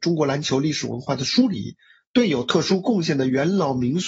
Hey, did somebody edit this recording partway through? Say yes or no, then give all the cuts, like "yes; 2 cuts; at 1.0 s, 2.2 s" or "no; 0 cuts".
no; 0 cuts